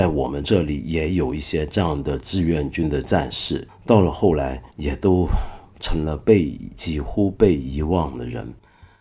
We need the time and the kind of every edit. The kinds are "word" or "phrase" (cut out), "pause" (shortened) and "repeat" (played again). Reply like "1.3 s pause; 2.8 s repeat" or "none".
4.7 s pause